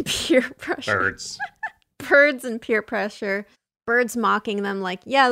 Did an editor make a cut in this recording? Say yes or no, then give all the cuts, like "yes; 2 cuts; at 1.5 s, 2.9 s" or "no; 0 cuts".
yes; 1 cut; at 3.5 s